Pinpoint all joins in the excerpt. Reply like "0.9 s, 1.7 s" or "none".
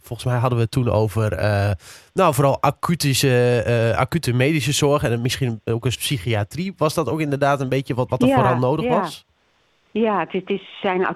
5.9 s, 8.1 s